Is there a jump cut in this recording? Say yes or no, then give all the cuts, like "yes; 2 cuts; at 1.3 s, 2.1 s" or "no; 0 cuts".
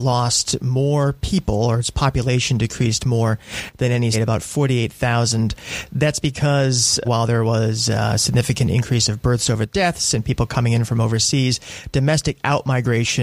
yes; 2 cuts; at 4.1 s, 7.0 s